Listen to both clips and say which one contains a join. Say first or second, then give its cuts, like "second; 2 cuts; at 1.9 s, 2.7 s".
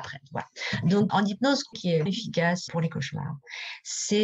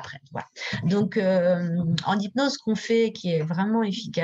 first; 4 cuts; at 1.1 s, 1.7 s, 2.1 s, 2.7 s